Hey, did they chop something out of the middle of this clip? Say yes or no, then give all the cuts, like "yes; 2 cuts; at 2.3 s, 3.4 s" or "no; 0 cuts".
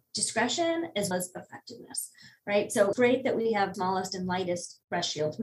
yes; 3 cuts; at 1.1 s, 2.9 s, 3.7 s